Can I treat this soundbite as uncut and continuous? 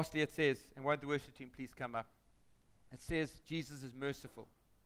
no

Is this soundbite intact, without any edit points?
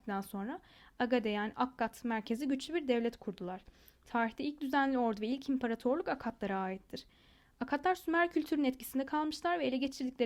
yes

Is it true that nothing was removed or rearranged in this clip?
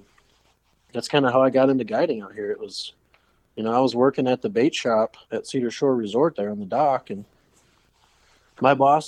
no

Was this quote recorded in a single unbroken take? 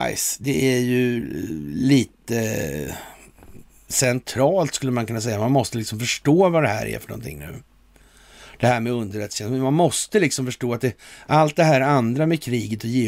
yes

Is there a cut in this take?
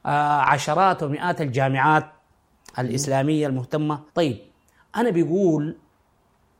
yes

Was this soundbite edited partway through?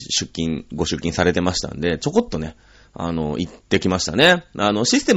no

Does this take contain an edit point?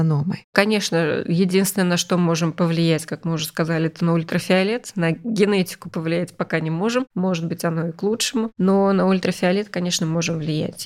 no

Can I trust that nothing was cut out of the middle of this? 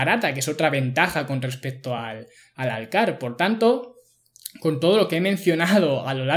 yes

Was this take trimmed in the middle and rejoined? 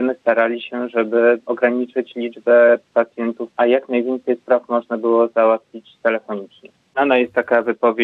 yes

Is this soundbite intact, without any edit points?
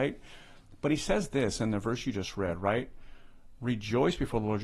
yes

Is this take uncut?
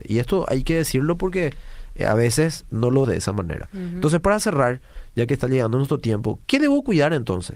no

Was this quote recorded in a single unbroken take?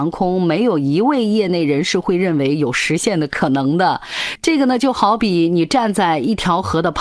yes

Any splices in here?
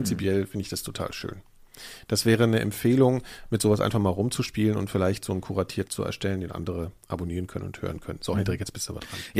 yes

